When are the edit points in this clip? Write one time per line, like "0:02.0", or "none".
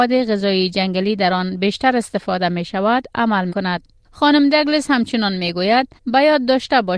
0:03.5
0:04.0
0:06.0